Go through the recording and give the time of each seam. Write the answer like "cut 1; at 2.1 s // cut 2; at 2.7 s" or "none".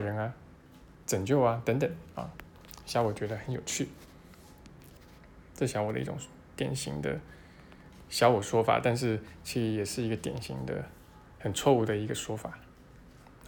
none